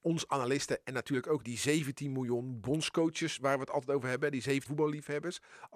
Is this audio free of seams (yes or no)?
no